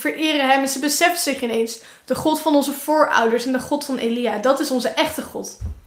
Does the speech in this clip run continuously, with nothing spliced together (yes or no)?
yes